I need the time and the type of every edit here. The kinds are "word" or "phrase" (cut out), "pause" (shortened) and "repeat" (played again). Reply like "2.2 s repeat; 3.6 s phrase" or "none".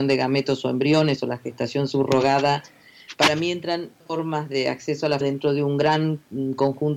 4.0 s phrase; 5.2 s word